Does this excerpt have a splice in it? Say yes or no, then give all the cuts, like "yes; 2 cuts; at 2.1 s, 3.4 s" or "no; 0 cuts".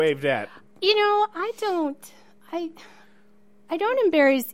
no; 0 cuts